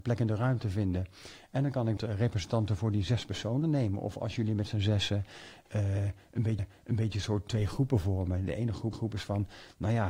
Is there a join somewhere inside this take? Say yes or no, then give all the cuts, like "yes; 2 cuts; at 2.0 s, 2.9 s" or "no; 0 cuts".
yes; 3 cuts; at 2.0 s, 6.6 s, 8.9 s